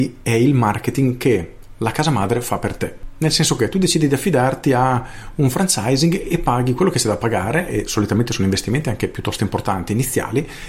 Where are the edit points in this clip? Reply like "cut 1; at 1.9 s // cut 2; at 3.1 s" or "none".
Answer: cut 1; at 6.7 s